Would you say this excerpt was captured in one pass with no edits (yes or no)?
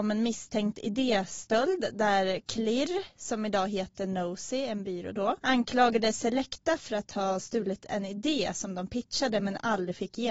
yes